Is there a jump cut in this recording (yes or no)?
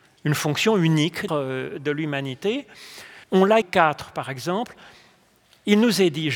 yes